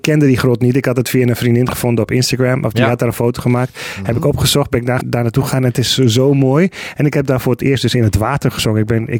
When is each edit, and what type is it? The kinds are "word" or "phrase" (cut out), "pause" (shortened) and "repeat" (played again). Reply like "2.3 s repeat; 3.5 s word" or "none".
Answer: 5.0 s word